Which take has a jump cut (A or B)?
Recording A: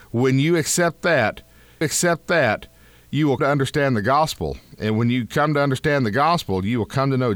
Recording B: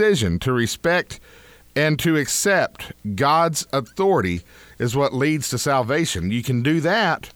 A